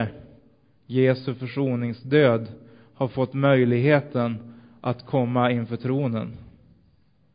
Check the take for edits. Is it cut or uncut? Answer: uncut